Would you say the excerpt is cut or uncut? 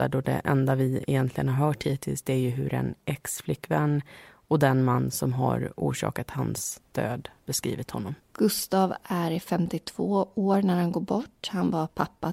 cut